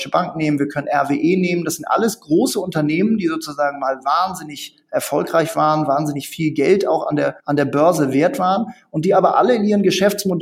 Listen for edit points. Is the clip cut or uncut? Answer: cut